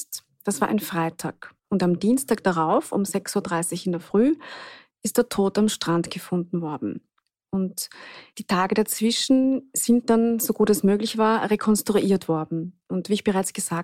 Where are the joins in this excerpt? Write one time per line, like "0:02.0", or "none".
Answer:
0:01.6
0:08.3